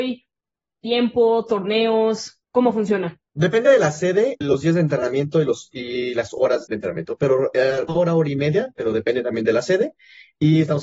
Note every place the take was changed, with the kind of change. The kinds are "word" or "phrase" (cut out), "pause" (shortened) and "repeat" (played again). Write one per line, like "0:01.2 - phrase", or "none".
0:02.4 - pause
0:03.3 - pause
0:04.4 - word
0:06.7 - word
0:07.9 - phrase

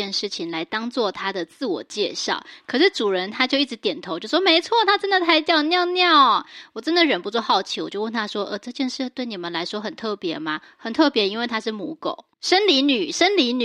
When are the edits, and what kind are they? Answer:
0:12.3 - pause

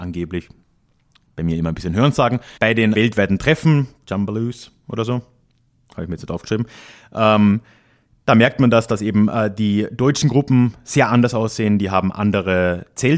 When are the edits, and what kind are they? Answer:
0:02.6 - pause
0:02.9 - word
0:04.0 - phrase

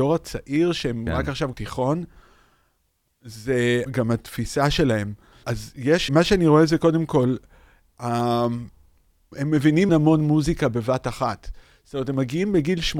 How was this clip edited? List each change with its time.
0:01.5 - word
0:03.9 - word
0:05.4 - word
0:06.1 - word
0:09.3 - word
0:09.9 - word

